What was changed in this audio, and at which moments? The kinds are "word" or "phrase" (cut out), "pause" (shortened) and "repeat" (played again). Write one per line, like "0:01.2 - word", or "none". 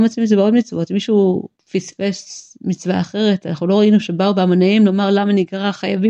none